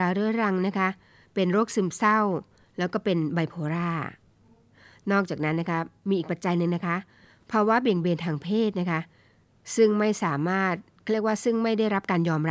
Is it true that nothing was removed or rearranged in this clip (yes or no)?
yes